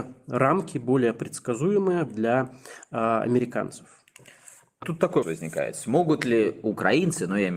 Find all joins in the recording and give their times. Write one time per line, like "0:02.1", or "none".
0:02.1
0:04.8
0:05.2